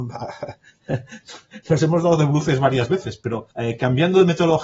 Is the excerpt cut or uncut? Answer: cut